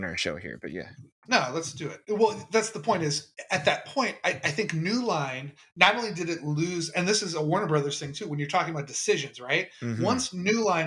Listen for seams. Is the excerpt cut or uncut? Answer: cut